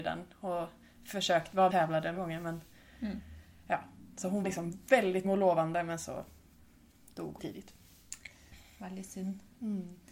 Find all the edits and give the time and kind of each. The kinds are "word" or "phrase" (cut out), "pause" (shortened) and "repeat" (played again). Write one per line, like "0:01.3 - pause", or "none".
0:01.7 - phrase
0:02.1 - word
0:04.4 - word
0:05.2 - word
0:07.4 - phrase